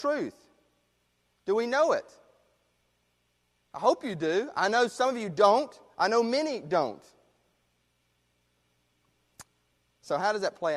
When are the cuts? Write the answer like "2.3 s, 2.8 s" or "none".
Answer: none